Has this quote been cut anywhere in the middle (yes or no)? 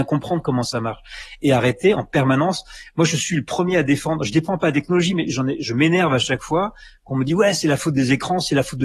no